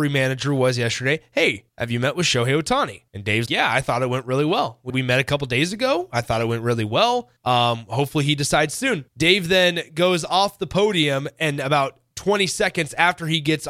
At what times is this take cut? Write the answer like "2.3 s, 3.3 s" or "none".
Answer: 1.7 s, 3.1 s, 3.5 s, 4.9 s, 7.4 s, 9.1 s